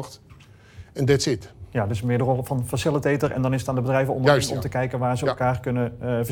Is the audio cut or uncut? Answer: uncut